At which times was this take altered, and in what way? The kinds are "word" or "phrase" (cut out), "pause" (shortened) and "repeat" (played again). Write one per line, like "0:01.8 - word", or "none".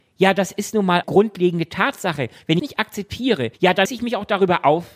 0:01.0 - word
0:02.6 - phrase
0:03.5 - pause
0:03.9 - word